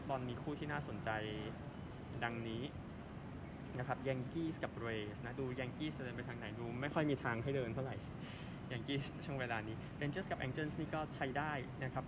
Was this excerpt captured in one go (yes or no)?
yes